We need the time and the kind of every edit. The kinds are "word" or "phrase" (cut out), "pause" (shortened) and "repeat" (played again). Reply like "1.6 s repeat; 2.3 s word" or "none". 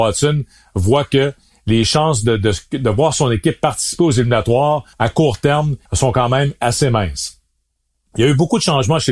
4.9 s pause; 5.9 s pause